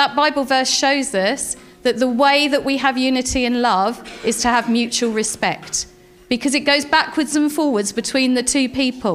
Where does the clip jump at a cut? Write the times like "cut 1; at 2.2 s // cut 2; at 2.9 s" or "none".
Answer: none